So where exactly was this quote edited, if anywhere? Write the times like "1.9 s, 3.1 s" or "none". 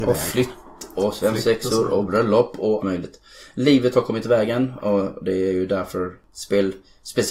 2.8 s